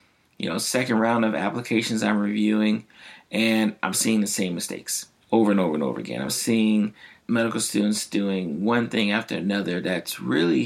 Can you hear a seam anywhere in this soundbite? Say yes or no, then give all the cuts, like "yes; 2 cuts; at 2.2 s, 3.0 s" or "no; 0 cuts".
yes; 4 cuts; at 3.9 s, 5.2 s, 6.3 s, 7.2 s